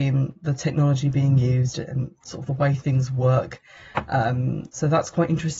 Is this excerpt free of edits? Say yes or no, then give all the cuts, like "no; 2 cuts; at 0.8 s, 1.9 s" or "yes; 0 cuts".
yes; 0 cuts